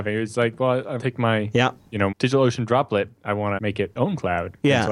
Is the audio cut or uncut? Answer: cut